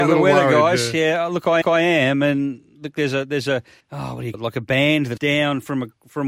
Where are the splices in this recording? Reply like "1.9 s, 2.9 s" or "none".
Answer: 1.6 s, 3.8 s, 4.3 s, 5.2 s